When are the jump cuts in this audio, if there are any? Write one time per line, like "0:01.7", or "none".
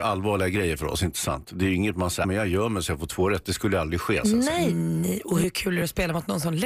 0:02.2